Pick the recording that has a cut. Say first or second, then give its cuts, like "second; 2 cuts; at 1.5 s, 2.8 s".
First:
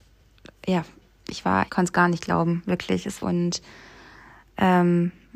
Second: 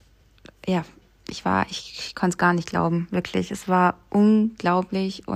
first; 2 cuts; at 1.7 s, 3.2 s